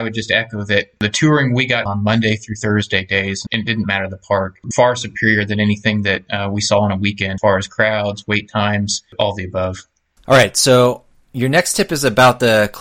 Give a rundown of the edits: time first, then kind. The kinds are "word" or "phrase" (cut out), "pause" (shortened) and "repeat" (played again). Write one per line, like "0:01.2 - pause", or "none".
0:01.9 - word
0:03.5 - word
0:04.7 - word
0:07.4 - word